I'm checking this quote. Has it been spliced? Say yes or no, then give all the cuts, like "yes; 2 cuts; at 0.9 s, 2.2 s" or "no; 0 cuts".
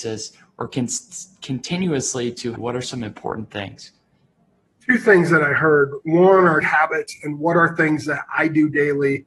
yes; 3 cuts; at 2.6 s, 4.7 s, 6.6 s